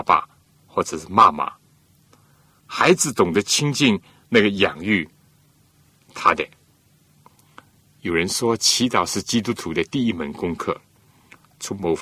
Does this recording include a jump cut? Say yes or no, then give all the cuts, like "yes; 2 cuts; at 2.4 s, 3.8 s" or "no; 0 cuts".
no; 0 cuts